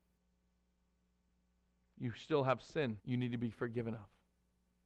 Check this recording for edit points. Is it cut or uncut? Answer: cut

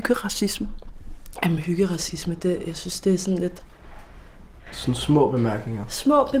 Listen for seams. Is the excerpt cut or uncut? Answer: uncut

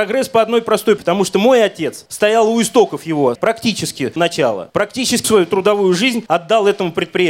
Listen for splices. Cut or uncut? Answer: cut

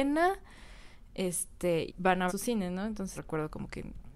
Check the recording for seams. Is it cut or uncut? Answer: cut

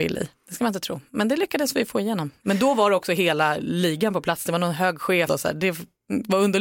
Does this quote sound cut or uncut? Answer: cut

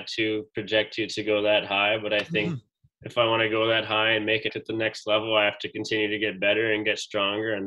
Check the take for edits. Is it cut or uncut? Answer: cut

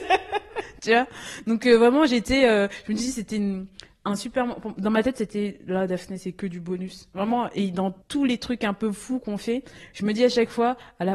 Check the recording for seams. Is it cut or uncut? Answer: cut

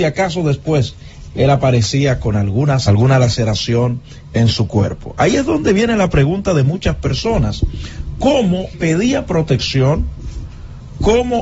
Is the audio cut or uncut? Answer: cut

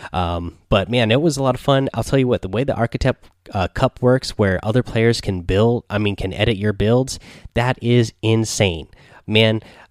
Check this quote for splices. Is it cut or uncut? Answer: uncut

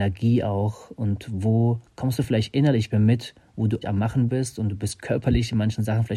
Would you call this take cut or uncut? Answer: cut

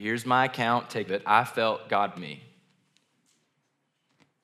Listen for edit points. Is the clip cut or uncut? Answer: cut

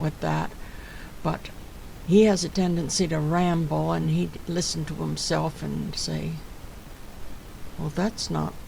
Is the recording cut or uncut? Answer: uncut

